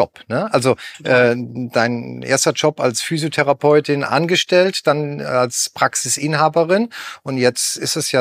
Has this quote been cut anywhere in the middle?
no; 0 cuts

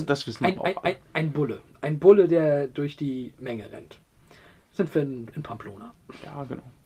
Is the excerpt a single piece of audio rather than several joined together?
yes; 0 cuts

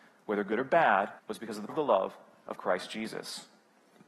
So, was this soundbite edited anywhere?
yes; 2 cuts; at 1.2 s, 1.7 s

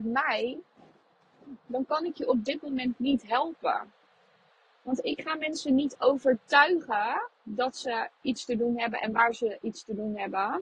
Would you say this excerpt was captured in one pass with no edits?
yes; 0 cuts

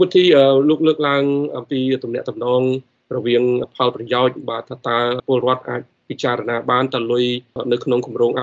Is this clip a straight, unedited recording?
yes; 0 cuts

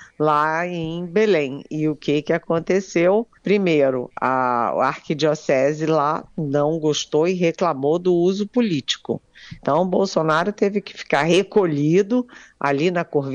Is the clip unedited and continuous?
no; 1 cut; at 3.4 s

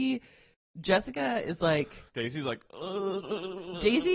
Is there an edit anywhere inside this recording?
yes; 1 cut; at 2.1 s

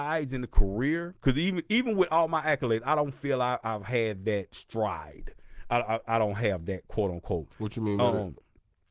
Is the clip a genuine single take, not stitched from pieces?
yes; 0 cuts

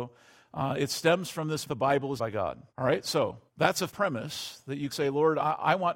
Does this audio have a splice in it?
yes; 6 cuts; at 1.7 s, 2.2 s, 2.7 s, 3.5 s, 3.9 s, 4.9 s

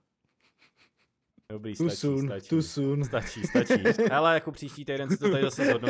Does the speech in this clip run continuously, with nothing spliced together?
yes; 0 cuts

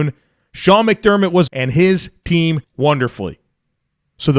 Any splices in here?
yes; 2 cuts; at 1.5 s, 2.6 s

